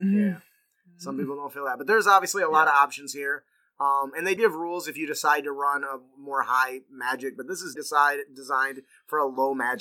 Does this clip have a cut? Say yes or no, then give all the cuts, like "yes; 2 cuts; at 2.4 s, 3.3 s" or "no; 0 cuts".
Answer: yes; 2 cuts; at 4.4 s, 7.8 s